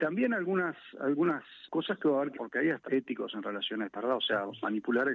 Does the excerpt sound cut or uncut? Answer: cut